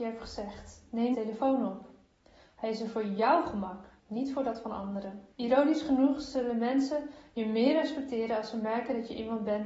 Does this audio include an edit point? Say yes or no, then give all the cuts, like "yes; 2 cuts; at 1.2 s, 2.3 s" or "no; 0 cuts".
yes; 3 cuts; at 1.1 s, 4.0 s, 5.3 s